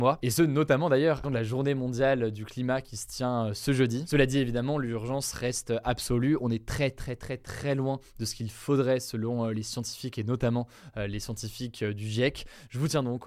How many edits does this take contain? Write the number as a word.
one